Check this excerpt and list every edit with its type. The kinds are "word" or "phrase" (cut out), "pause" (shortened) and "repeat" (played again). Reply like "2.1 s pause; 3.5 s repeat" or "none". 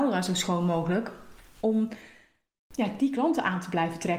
none